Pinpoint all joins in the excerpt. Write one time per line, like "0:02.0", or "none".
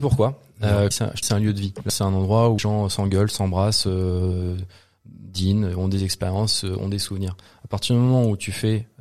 0:00.9
0:01.2
0:01.9
0:02.6